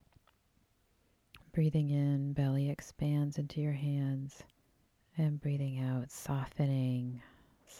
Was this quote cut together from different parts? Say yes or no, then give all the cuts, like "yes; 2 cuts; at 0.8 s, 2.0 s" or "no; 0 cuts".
yes; 1 cut; at 4.6 s